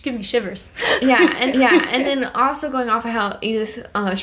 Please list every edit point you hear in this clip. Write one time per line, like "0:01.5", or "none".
0:01.5